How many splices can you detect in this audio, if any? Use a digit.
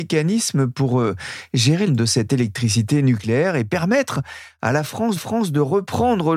2